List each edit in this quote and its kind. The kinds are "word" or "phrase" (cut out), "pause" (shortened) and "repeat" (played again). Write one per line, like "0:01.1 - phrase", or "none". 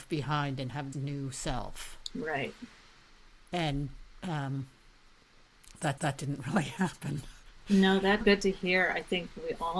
0:00.9 - word
0:06.0 - repeat
0:08.2 - word